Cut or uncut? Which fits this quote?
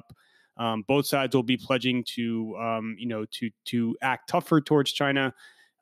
uncut